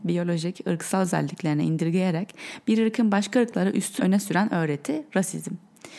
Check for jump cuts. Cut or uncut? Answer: cut